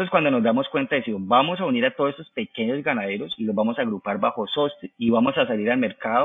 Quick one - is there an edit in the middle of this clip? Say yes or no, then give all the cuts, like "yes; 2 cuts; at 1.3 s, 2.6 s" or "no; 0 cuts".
yes; 1 cut; at 4.9 s